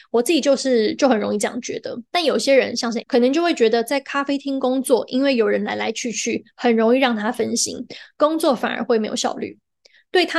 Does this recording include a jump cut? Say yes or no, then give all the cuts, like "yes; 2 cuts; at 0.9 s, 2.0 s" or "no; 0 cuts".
yes; 2 cuts; at 2.1 s, 3.0 s